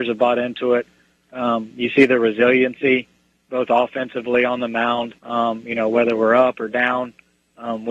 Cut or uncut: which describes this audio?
cut